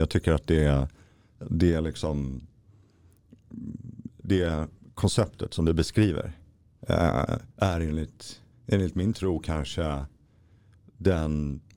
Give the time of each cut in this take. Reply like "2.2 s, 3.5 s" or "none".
4.2 s, 7.5 s, 8.5 s